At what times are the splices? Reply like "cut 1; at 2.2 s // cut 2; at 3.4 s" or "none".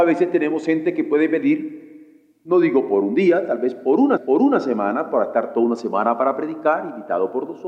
cut 1; at 4.2 s